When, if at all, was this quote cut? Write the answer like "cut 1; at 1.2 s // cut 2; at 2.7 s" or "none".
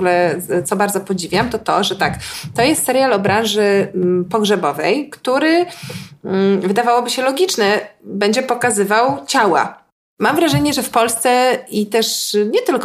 none

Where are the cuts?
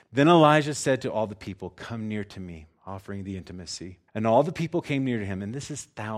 cut 1; at 4.1 s

